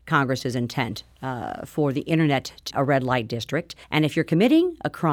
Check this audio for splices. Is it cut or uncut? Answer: cut